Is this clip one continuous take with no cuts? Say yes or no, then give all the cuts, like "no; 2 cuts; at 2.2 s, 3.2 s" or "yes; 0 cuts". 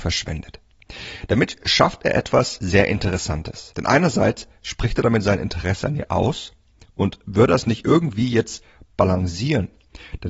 yes; 0 cuts